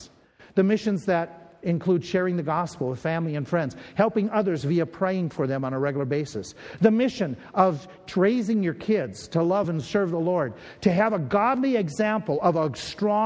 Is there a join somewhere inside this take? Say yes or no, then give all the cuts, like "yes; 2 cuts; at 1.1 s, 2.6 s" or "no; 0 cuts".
no; 0 cuts